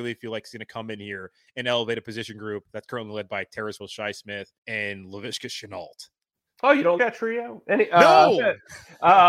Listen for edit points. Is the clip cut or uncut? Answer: cut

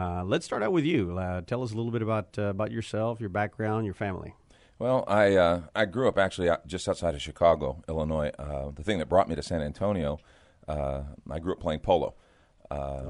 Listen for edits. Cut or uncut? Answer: uncut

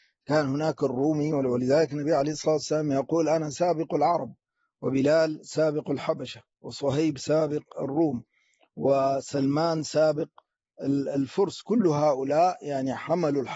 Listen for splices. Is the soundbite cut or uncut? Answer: uncut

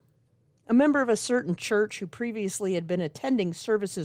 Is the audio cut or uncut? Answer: uncut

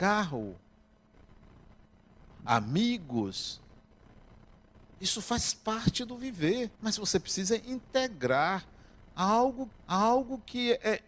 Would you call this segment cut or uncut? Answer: cut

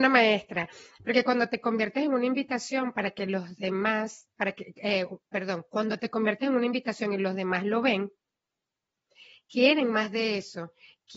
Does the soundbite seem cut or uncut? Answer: uncut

